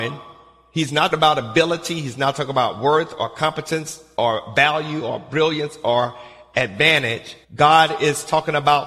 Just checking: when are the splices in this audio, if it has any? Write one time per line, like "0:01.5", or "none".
0:01.1
0:07.4

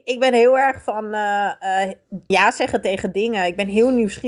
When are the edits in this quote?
0:02.3

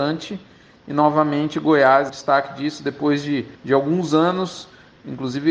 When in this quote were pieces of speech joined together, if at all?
0:02.1
0:03.6

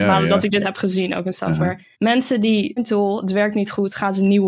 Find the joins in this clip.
0:01.9
0:02.8

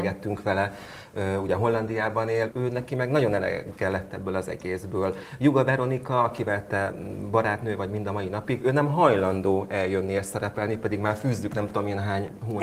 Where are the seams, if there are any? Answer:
0:02.5

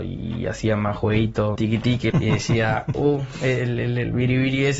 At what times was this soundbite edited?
0:01.6
0:02.1

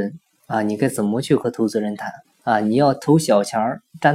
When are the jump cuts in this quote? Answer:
0:02.2

